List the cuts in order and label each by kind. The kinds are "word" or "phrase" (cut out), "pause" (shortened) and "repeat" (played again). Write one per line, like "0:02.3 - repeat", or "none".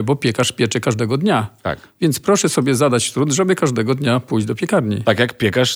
none